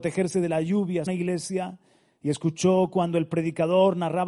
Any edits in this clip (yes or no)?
yes